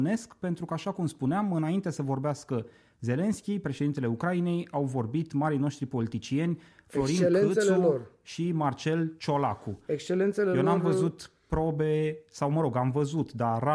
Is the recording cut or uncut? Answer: uncut